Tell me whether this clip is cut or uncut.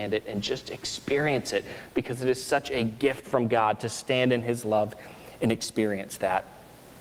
uncut